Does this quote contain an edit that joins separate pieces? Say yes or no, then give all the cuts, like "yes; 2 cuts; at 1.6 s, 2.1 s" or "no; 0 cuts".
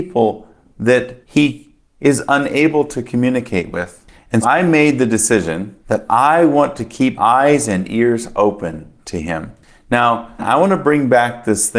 yes; 5 cuts; at 1.2 s, 4.4 s, 5.8 s, 7.2 s, 10.4 s